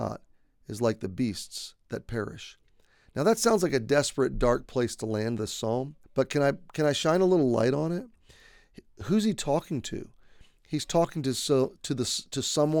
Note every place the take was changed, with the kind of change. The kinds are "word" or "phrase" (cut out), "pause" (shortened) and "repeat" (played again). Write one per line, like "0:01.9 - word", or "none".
0:06.0 - pause